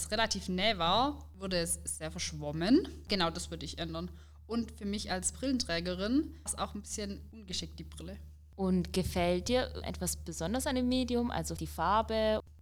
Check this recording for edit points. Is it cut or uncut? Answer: cut